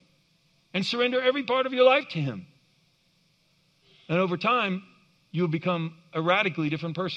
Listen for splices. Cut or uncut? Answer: uncut